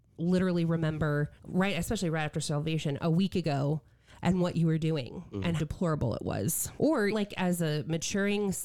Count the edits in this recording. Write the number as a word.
four